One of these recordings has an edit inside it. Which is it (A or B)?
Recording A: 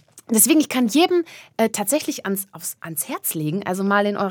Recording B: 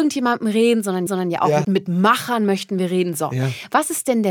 B